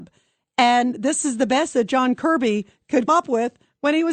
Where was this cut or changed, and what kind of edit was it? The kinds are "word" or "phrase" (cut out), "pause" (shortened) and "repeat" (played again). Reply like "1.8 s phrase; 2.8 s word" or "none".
3.1 s word